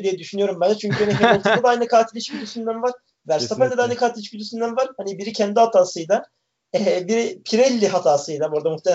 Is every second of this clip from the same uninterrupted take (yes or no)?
yes